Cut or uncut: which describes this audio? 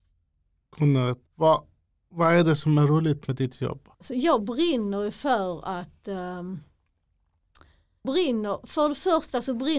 cut